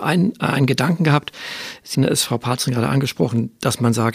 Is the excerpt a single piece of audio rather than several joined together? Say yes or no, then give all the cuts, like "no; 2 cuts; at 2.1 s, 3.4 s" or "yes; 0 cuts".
no; 1 cut; at 1.9 s